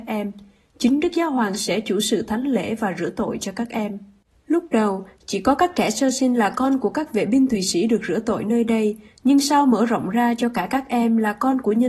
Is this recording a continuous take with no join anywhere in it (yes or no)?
yes